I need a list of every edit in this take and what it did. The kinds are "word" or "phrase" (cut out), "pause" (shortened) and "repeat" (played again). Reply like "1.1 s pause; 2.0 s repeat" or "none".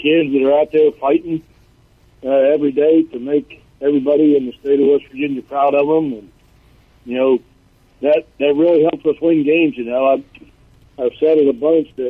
none